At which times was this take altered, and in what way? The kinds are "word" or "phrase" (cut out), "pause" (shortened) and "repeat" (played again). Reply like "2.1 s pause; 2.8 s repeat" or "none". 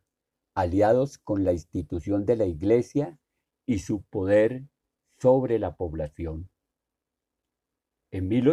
none